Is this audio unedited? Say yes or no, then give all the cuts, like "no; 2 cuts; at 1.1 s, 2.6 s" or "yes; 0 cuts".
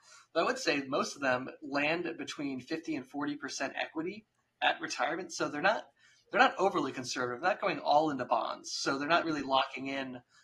yes; 0 cuts